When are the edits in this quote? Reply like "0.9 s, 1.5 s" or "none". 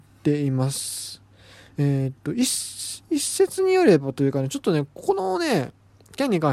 3.0 s